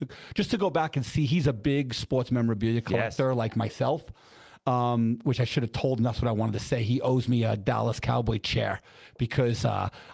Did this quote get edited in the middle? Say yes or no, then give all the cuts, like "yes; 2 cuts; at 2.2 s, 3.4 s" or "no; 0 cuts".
no; 0 cuts